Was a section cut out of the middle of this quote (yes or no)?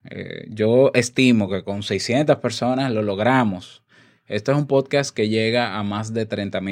no